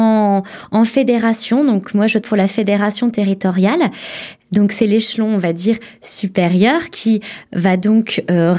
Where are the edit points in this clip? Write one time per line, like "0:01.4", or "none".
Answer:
0:02.2